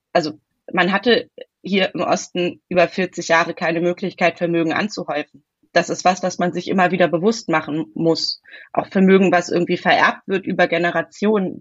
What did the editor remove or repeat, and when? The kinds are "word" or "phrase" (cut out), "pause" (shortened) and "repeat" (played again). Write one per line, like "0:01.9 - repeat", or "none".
none

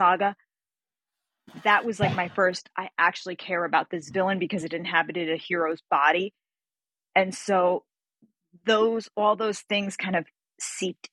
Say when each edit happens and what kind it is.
none

